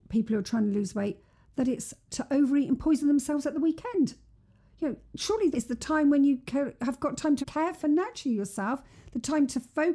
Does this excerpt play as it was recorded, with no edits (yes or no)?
no